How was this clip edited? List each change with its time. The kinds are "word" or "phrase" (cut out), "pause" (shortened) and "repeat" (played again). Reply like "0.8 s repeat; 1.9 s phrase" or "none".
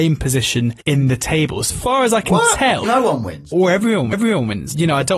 1.7 s word; 2.8 s word; 3.5 s word; 4.1 s repeat